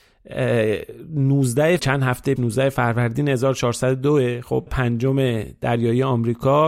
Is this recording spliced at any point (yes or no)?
yes